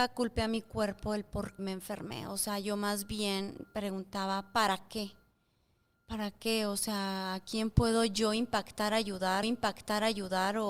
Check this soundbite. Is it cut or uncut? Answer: cut